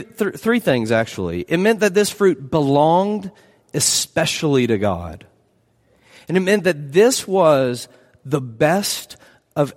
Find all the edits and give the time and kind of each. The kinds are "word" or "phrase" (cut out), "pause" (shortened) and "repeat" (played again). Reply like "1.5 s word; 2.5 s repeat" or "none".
none